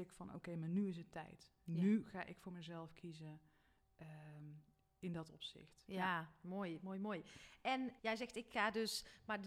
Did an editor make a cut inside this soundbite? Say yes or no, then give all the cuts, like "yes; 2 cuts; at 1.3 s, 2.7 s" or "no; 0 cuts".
yes; 1 cut; at 8.0 s